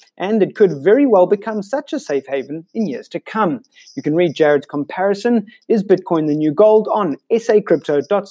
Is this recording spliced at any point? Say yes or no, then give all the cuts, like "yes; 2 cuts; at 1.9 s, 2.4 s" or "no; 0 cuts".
no; 0 cuts